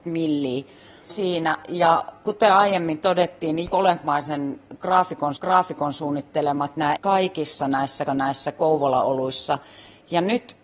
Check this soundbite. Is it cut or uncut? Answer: cut